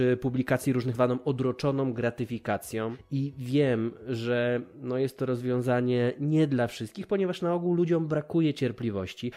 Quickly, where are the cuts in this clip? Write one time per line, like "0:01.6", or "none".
0:00.9